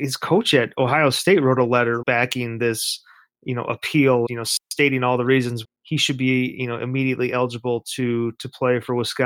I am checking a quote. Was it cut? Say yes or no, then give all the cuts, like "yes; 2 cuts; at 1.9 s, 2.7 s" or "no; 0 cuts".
yes; 3 cuts; at 2.0 s, 4.3 s, 5.6 s